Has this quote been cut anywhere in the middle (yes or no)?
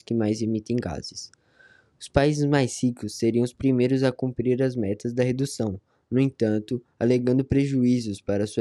no